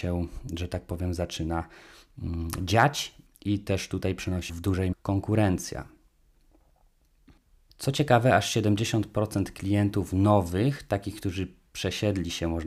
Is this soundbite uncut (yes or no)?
no